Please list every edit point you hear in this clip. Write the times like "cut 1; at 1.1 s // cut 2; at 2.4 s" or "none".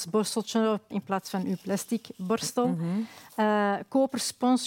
cut 1; at 0.9 s